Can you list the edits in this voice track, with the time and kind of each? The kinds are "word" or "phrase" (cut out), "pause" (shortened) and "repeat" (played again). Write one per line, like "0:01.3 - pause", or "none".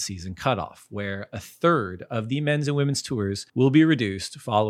0:03.5 - pause